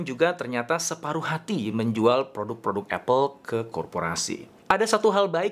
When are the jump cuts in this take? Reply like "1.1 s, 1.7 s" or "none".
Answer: none